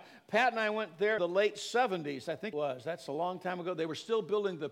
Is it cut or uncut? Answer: cut